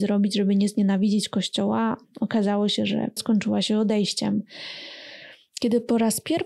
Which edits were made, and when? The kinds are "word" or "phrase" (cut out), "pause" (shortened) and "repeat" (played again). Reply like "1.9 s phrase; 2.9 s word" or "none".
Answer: 3.2 s word